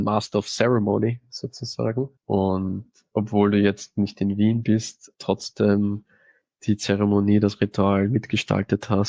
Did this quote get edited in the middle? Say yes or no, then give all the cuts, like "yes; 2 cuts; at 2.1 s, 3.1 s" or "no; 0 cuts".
yes; 2 cuts; at 2.2 s, 5.1 s